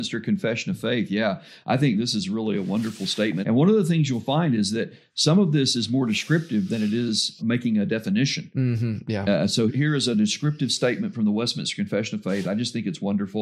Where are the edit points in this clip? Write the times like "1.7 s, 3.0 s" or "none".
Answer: 3.4 s, 7.4 s, 9.7 s